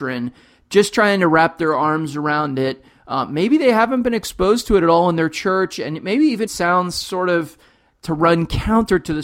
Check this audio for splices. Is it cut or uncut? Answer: cut